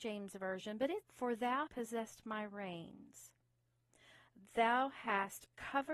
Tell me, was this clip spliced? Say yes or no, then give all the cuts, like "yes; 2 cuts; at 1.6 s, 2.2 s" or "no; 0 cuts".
yes; 2 cuts; at 1.0 s, 1.7 s